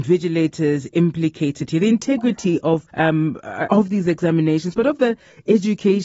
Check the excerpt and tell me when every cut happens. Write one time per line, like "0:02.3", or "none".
0:02.9
0:03.7